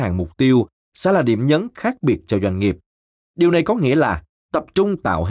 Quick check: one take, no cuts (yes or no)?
yes